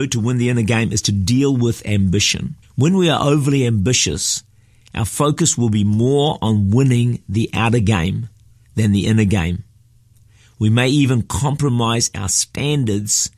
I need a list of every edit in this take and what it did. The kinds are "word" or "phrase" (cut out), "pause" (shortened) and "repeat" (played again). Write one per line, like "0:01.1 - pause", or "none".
0:02.6 - pause